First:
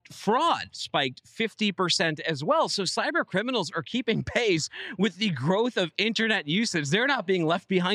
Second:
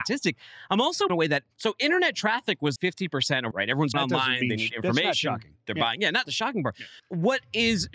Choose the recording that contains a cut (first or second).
second